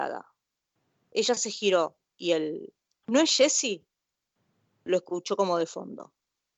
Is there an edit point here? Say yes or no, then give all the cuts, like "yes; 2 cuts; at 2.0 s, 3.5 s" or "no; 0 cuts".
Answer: no; 0 cuts